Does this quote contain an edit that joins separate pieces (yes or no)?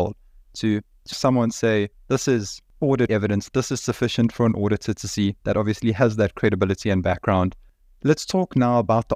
yes